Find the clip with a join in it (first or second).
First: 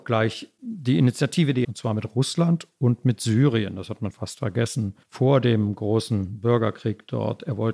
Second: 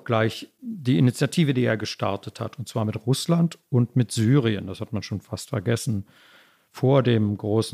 first